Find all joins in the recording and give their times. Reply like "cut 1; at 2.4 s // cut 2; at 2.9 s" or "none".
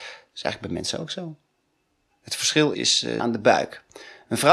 cut 1; at 2.7 s // cut 2; at 3.2 s